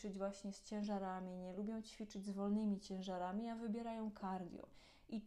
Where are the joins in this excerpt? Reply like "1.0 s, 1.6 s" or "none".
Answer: none

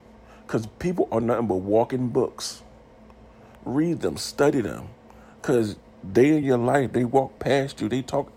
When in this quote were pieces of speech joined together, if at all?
none

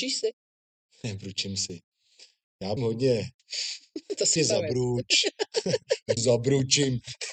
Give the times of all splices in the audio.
2.8 s, 4.4 s, 6.2 s

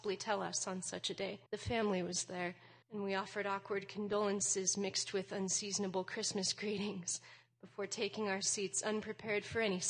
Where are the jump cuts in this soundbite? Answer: 1.5 s, 2.8 s

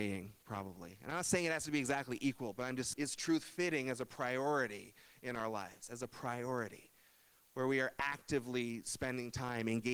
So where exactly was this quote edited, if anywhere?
2.9 s

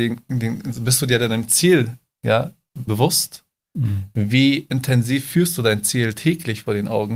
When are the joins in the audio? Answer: 2.9 s

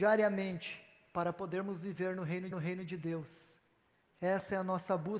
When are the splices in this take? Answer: 2.5 s

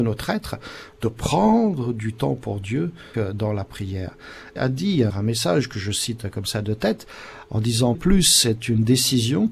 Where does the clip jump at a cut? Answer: 3.1 s, 4.6 s, 5.1 s, 7.9 s

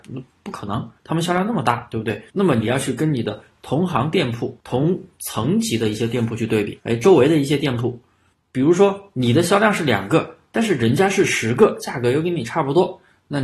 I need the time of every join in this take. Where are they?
1.0 s, 2.3 s, 4.6 s, 6.8 s, 8.3 s

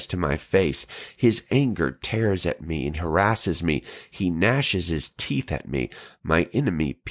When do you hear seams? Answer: 2.9 s

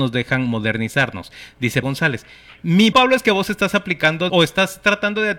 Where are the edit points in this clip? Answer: 1.8 s, 2.9 s, 4.3 s

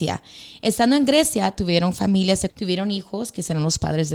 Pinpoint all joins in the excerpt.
2.5 s

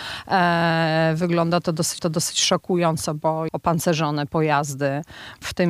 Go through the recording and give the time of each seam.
2.0 s, 3.5 s

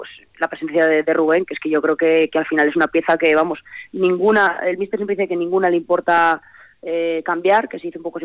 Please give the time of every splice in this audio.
none

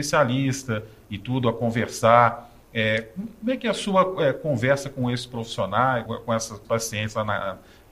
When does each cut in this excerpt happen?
6.1 s, 6.6 s

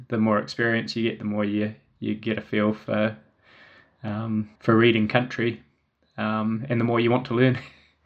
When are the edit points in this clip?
4.5 s

